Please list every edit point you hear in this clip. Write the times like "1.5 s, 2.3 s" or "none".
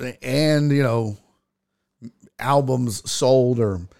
none